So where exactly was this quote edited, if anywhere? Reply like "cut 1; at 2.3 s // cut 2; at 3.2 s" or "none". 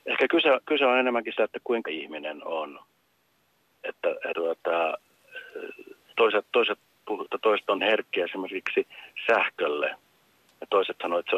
cut 1; at 1.4 s // cut 2; at 1.9 s // cut 3; at 4.3 s // cut 4; at 6.1 s // cut 5; at 7.3 s // cut 6; at 7.8 s